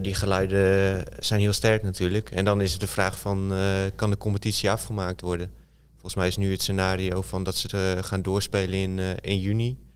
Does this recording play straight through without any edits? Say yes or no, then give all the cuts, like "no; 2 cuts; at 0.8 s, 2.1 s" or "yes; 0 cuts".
yes; 0 cuts